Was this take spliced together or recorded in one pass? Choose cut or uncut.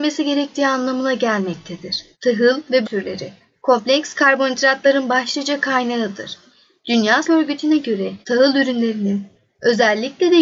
cut